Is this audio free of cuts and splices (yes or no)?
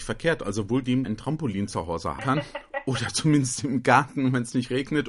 no